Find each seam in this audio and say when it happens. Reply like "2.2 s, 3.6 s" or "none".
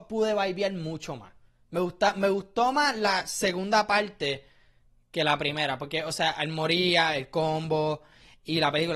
none